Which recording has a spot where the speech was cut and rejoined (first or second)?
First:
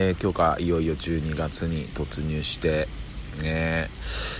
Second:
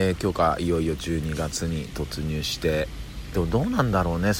second